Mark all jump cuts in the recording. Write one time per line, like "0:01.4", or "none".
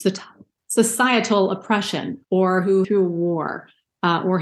0:02.2
0:02.8